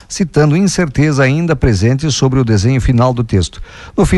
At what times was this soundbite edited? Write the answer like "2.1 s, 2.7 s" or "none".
none